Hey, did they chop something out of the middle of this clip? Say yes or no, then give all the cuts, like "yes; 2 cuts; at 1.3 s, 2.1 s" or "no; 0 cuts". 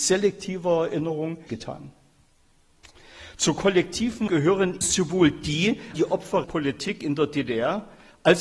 yes; 5 cuts; at 1.5 s, 4.3 s, 4.8 s, 5.9 s, 6.4 s